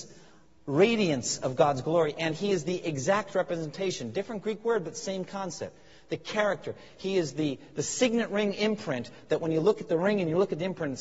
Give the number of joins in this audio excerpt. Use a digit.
0